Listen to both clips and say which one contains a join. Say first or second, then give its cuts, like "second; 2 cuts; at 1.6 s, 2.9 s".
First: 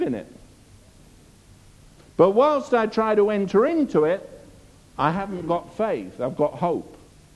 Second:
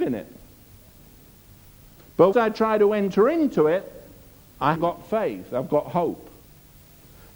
second; 2 cuts; at 2.3 s, 4.8 s